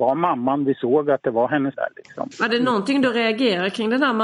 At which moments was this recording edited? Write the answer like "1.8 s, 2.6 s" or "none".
1.7 s